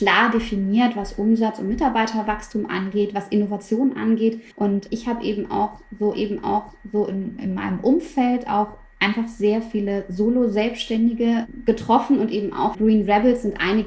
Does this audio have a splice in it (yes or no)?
yes